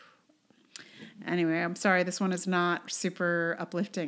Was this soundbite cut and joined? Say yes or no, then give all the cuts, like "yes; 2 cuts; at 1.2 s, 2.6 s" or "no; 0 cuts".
no; 0 cuts